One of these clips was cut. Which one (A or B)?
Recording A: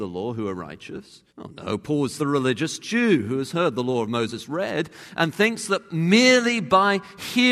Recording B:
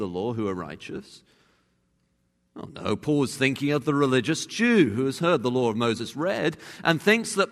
A